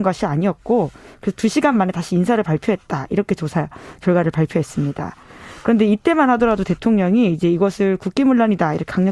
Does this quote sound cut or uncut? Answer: uncut